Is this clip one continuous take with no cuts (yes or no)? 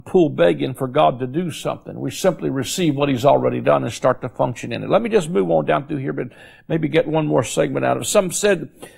yes